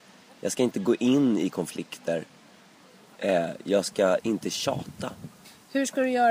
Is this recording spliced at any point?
no; 0 cuts

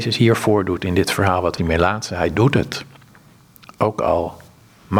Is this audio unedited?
no; 1 cut; at 1.6 s

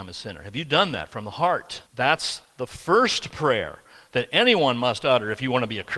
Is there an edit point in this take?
yes; 1 cut; at 1.9 s

